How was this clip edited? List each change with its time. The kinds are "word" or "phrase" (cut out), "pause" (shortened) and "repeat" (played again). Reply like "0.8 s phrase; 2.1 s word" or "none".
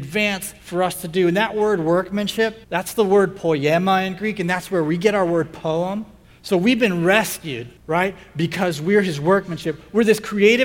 2.6 s pause; 6.2 s pause; 7.8 s pause